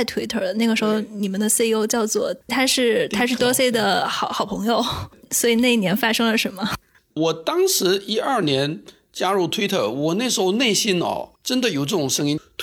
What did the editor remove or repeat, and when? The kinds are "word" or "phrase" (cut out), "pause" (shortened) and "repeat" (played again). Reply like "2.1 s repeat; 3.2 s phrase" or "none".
2.4 s word; 3.4 s word; 11.4 s pause